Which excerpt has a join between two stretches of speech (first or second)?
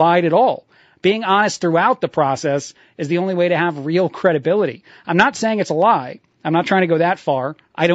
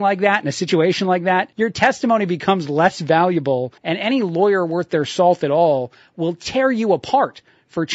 second